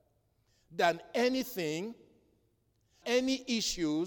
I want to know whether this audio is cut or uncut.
cut